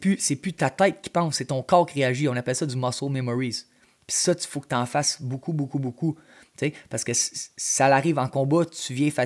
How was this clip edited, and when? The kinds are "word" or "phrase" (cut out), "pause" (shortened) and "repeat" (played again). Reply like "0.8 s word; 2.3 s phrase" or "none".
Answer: none